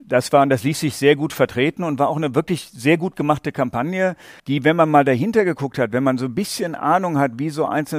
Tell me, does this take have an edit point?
yes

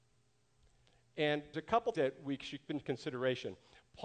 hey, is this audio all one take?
no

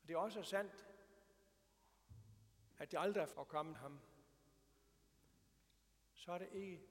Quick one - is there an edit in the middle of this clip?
yes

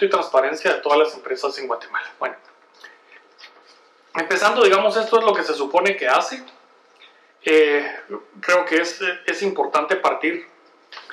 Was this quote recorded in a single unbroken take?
yes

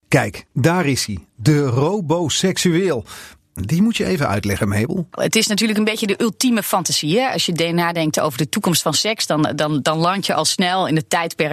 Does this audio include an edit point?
no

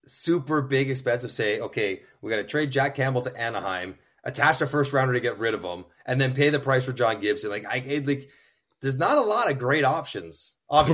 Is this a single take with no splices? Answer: yes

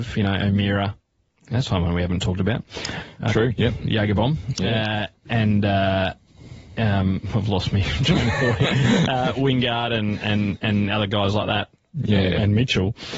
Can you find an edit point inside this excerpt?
no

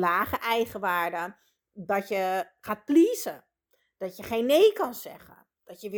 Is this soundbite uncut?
yes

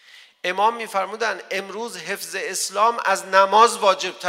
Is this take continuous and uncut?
yes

